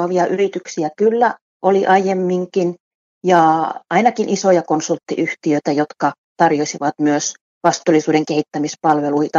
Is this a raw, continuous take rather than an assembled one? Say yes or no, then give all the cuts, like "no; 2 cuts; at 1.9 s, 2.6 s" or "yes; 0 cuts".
yes; 0 cuts